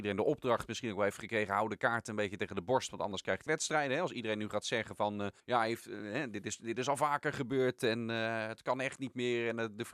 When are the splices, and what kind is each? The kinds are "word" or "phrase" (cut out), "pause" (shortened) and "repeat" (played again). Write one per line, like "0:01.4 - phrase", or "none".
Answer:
0:03.5 - phrase
0:05.4 - pause